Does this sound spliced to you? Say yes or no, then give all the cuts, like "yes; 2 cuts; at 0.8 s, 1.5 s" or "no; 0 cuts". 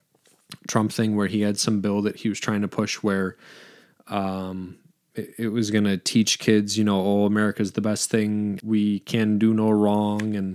yes; 2 cuts; at 4.9 s, 8.6 s